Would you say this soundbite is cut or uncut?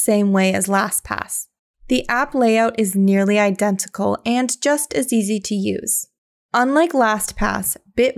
uncut